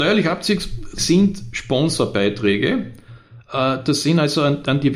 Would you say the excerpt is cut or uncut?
cut